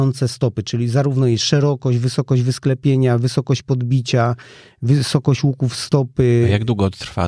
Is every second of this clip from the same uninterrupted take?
yes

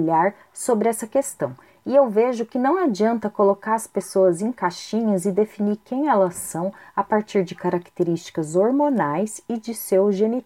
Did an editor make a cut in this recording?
no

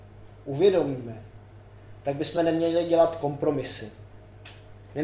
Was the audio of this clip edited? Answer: no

